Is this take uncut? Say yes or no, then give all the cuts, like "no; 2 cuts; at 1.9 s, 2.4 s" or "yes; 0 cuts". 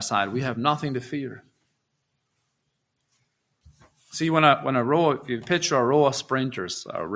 yes; 0 cuts